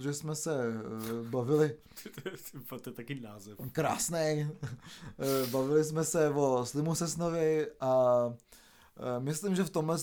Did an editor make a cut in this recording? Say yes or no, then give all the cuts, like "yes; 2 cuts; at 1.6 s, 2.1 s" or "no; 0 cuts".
no; 0 cuts